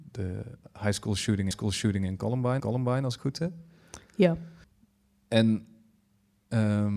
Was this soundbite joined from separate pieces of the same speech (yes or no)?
yes